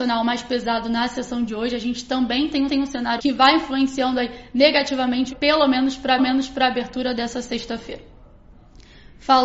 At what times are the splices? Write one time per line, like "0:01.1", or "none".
0:02.7
0:03.2
0:05.3
0:06.2

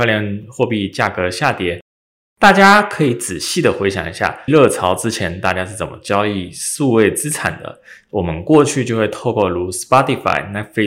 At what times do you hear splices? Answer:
0:04.5

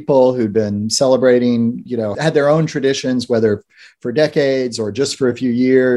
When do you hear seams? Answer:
0:02.1

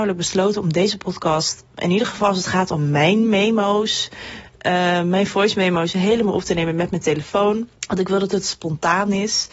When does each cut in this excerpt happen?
0:01.7
0:07.8

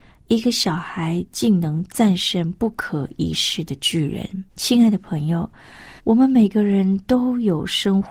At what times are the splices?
0:04.5
0:06.0

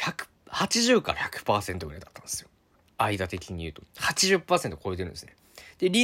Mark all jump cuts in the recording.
0:02.7

